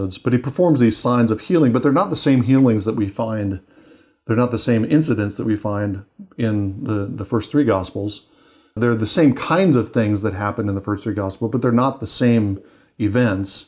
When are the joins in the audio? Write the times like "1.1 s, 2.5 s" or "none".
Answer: none